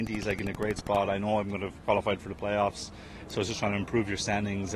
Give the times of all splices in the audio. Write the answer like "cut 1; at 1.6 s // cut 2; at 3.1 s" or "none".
none